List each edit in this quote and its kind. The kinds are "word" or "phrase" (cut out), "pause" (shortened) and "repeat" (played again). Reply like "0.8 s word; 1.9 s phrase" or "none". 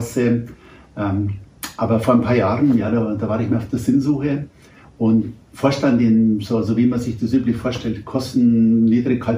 none

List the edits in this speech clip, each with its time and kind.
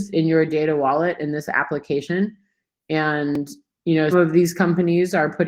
4.1 s word

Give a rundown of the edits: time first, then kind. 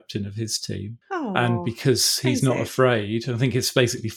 1.0 s pause

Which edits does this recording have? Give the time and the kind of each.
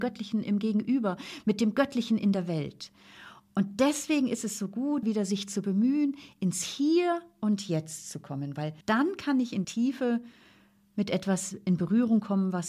5.0 s word; 8.8 s pause; 9.6 s word

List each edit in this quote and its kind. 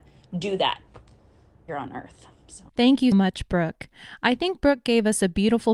1.7 s phrase; 2.7 s pause; 3.1 s word

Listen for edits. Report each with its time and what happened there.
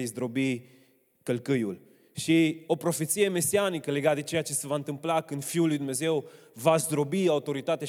2.7 s word

